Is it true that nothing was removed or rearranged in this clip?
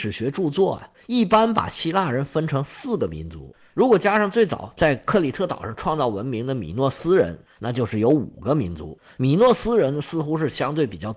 yes; 0 cuts

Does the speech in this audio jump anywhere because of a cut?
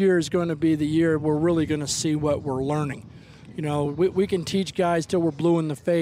no; 0 cuts

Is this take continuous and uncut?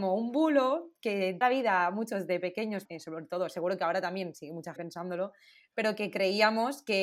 no; 3 cuts; at 1.4 s, 2.8 s, 4.8 s

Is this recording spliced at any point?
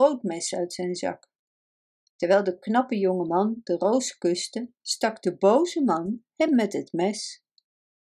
no; 0 cuts

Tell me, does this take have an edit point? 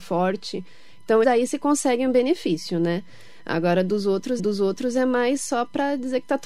yes; 2 cuts; at 1.2 s, 4.4 s

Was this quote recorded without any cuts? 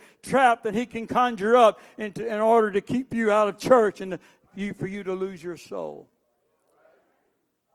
yes; 0 cuts

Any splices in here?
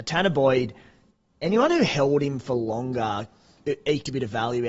no; 0 cuts

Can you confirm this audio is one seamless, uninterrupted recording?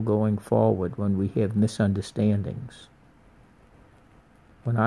yes; 0 cuts

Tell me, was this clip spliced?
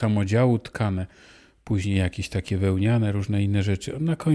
no; 0 cuts

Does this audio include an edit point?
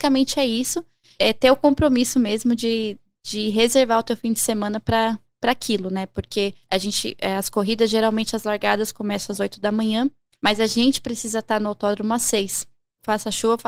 yes; 1 cut; at 6.6 s

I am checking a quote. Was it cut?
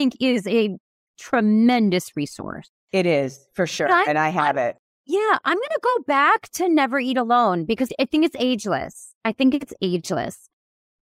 no; 0 cuts

